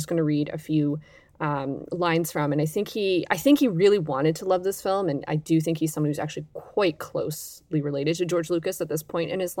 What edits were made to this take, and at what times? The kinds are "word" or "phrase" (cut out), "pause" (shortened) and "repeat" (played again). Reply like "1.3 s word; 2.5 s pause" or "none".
none